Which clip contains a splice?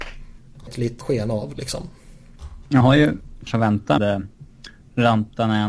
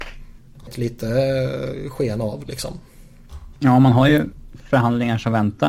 first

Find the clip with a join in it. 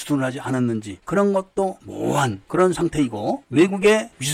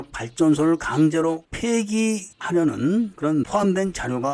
second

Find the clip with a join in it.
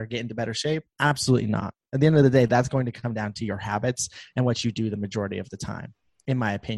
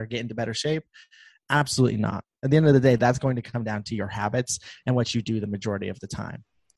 first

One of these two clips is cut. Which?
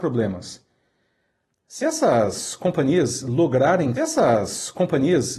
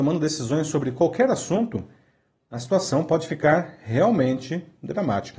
first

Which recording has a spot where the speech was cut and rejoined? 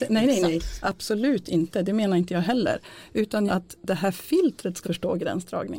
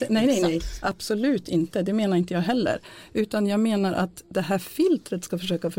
first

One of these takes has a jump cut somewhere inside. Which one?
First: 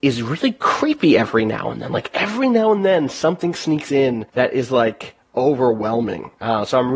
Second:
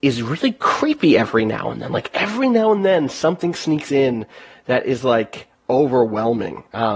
first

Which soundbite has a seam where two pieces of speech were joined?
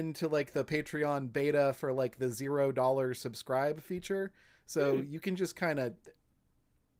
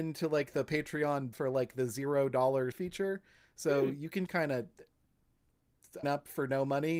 second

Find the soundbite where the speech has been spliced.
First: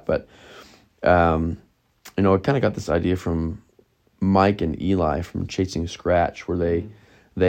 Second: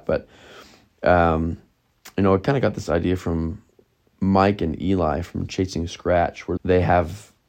second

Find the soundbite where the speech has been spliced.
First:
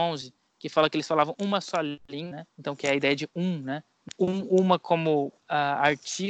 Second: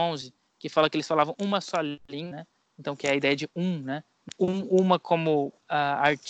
first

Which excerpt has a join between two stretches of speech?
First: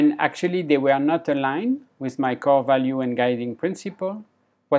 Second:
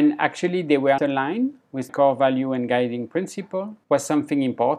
second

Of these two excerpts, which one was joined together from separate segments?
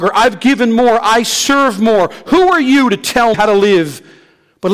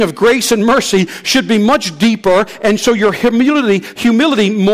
first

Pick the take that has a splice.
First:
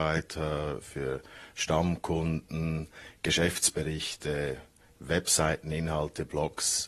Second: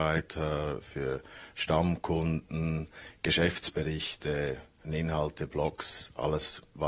second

